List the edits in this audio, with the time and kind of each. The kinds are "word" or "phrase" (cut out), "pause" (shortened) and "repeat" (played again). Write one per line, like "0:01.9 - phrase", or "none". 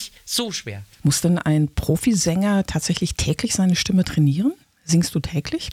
0:00.9 - pause
0:04.6 - pause